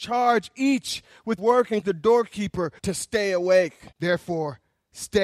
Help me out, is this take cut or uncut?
cut